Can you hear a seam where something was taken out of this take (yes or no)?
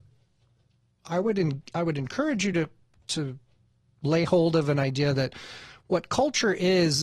no